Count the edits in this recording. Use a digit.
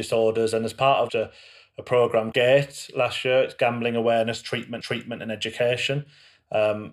3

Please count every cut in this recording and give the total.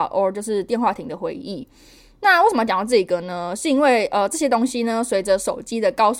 0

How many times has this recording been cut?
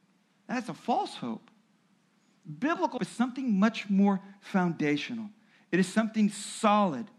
1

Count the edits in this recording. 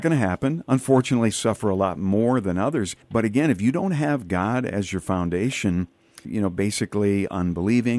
3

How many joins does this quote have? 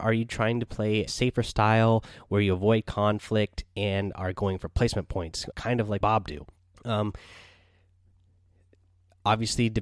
4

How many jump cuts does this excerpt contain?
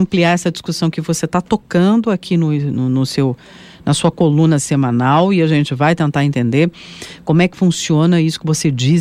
0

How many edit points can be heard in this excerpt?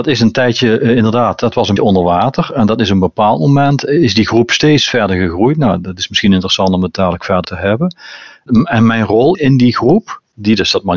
3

